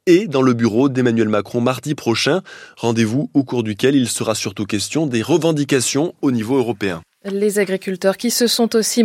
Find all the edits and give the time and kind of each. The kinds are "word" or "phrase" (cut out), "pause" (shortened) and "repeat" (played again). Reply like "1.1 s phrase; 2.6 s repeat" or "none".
none